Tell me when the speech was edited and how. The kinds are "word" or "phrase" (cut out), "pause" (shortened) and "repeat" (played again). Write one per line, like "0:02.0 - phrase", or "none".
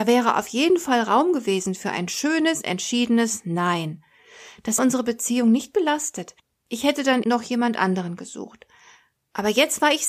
0:04.8 - word
0:07.2 - word